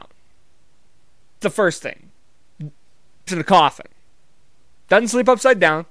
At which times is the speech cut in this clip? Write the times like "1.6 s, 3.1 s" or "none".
1.4 s, 3.3 s